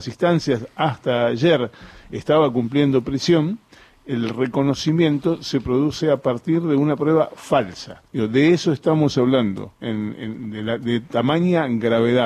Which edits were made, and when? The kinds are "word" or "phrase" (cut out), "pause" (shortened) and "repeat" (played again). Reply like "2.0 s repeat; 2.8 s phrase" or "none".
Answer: 8.0 s pause